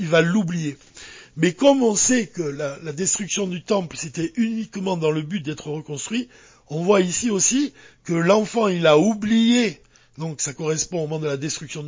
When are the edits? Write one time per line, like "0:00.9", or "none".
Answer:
none

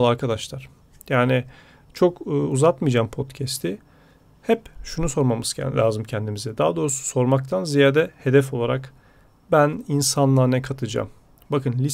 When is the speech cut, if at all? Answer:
none

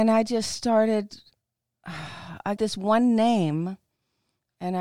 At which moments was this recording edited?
0:02.6

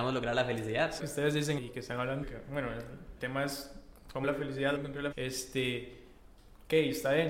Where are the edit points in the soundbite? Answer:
0:01.0
0:01.6
0:02.2
0:03.2
0:04.2
0:04.8
0:05.1

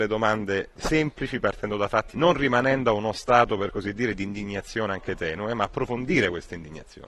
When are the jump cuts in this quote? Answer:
0:02.1

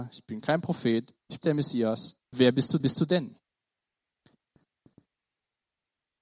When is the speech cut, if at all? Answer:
0:01.4
0:02.2
0:02.8

